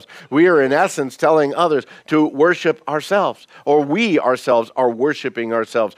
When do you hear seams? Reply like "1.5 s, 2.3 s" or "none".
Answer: none